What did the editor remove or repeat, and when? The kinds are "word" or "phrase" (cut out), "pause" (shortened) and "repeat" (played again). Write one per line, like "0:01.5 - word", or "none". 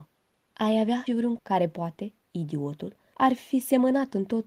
0:01.1 - word
0:01.4 - word